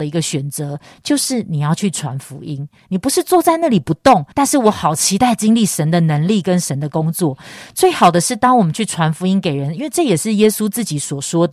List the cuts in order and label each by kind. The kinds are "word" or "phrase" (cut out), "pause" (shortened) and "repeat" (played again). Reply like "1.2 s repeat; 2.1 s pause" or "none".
4.3 s pause